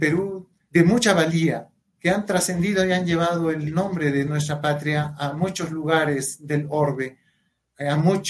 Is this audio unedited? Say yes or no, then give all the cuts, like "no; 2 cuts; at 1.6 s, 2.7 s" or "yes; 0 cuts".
yes; 0 cuts